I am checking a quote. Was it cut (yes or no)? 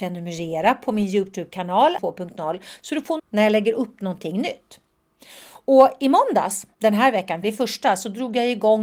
yes